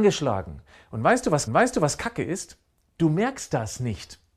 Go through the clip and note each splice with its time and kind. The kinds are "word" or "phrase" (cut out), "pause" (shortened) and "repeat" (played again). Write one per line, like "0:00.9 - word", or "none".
0:01.5 - repeat